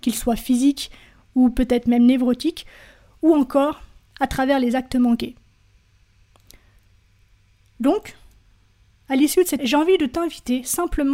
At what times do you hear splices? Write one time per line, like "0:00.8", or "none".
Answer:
0:09.6